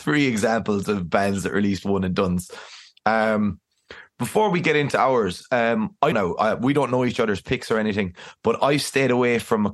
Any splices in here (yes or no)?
yes